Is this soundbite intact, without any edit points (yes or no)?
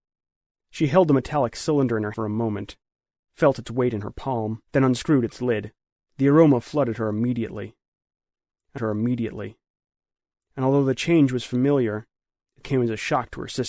no